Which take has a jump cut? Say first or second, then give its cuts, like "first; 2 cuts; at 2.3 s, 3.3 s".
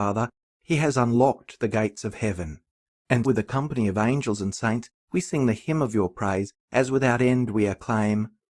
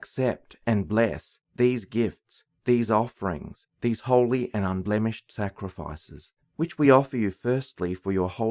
first; 1 cut; at 3.2 s